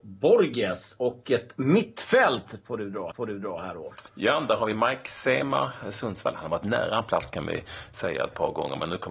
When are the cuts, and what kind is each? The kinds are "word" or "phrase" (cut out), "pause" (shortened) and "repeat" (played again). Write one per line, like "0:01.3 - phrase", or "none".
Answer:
0:03.1 - repeat
0:04.1 - pause